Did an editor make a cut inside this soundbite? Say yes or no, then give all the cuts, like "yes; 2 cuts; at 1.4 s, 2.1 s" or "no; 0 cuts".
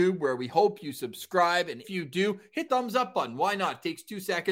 yes; 2 cuts; at 1.8 s, 2.7 s